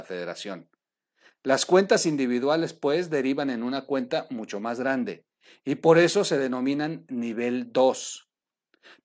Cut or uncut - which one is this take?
uncut